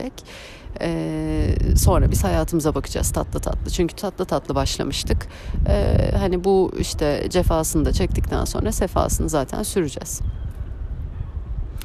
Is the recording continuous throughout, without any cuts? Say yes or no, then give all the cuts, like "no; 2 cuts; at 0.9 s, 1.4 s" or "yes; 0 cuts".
yes; 0 cuts